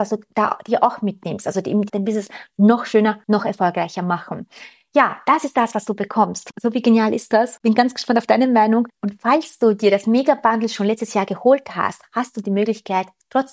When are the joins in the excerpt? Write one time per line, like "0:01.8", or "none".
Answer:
0:01.9
0:03.2